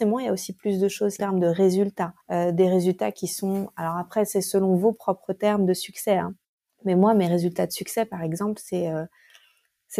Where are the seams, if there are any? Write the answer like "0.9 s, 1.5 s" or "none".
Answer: 1.2 s, 2.2 s, 6.4 s

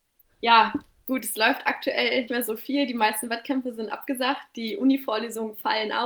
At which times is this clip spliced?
2.3 s

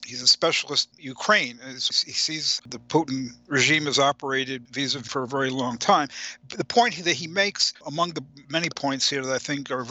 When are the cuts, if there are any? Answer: 0.9 s, 1.9 s, 2.6 s, 5.1 s, 7.7 s

